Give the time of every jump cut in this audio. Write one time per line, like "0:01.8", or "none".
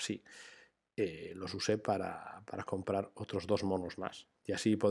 none